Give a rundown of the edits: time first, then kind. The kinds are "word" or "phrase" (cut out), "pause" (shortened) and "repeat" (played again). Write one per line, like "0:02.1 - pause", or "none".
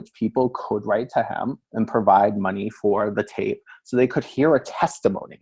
0:01.6 - pause